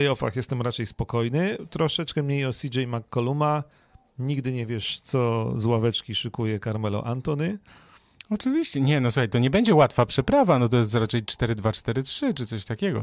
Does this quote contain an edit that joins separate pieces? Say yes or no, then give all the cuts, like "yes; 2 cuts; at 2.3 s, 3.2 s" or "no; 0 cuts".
no; 0 cuts